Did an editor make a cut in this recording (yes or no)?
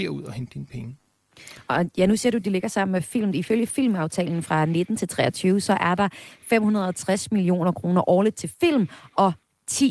no